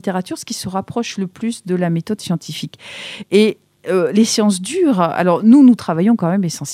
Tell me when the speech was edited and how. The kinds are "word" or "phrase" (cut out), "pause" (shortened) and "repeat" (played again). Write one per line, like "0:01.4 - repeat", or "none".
none